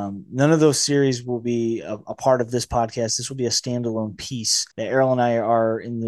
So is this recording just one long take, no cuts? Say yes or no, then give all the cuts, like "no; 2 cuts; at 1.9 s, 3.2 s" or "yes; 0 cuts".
no; 1 cut; at 4.7 s